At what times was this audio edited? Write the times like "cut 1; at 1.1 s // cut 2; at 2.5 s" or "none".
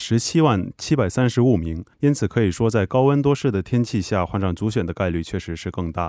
cut 1; at 1.9 s